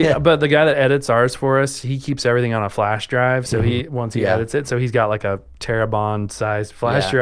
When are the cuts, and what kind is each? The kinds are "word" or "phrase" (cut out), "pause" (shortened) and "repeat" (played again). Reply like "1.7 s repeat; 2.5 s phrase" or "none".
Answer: none